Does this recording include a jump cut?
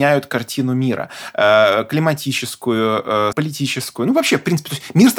yes; 1 cut; at 3.3 s

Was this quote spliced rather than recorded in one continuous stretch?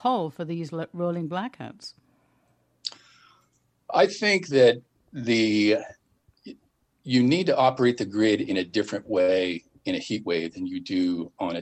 no; 0 cuts

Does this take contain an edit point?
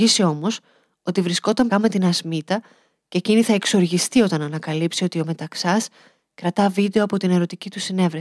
yes; 1 cut; at 1.7 s

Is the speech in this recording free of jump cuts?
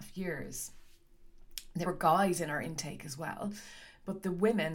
no; 1 cut; at 1.9 s

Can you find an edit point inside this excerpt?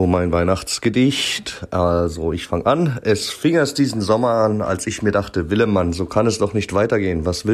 no; 0 cuts

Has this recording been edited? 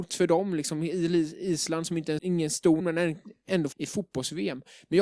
yes; 3 cuts; at 2.2 s, 2.8 s, 3.7 s

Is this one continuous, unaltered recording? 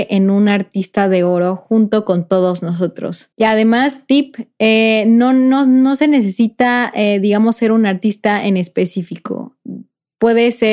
no; 1 cut; at 3.3 s

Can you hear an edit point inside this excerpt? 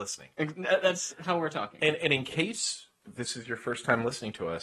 no; 0 cuts

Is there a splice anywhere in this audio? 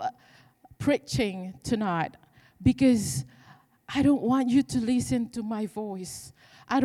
no; 0 cuts

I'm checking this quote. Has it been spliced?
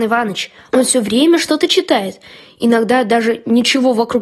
no; 0 cuts

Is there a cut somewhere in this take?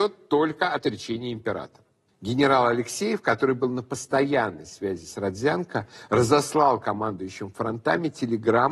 no; 0 cuts

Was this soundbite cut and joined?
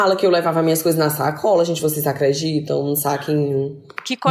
no; 0 cuts

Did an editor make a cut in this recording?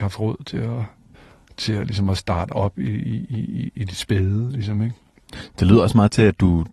yes; 1 cut; at 1.1 s

